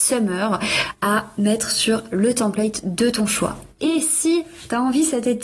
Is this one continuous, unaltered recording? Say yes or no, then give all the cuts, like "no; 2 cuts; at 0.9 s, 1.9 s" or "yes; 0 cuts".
yes; 0 cuts